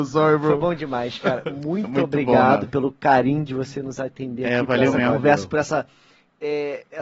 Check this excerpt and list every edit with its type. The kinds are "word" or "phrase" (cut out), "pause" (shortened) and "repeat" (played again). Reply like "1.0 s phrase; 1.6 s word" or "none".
none